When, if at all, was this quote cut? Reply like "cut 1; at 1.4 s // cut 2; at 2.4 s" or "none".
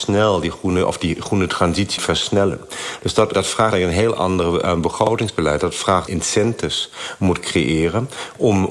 cut 1; at 2.0 s // cut 2; at 3.3 s // cut 3; at 6.1 s

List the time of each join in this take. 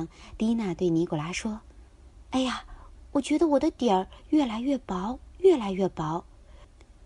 cut 1; at 1.9 s

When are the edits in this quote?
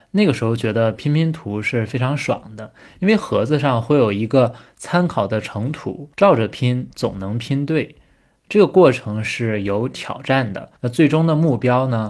cut 1; at 6.1 s // cut 2; at 10.8 s

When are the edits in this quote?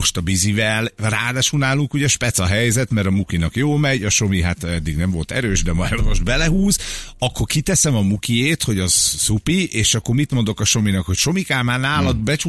cut 1; at 6.0 s

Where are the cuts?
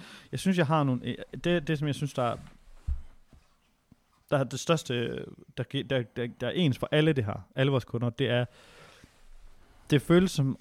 none

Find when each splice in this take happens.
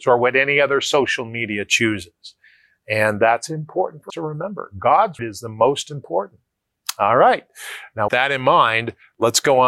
cut 1; at 4.1 s // cut 2; at 5.2 s // cut 3; at 8.1 s

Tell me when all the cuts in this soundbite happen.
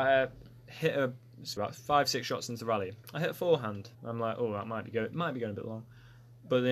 cut 1; at 1.6 s // cut 2; at 3.9 s

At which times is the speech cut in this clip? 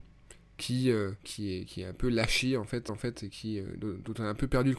cut 1; at 1.2 s // cut 2; at 2.9 s

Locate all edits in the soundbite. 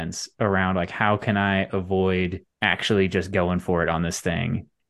cut 1; at 2.5 s

